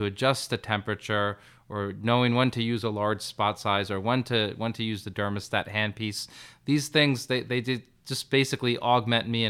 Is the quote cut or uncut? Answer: uncut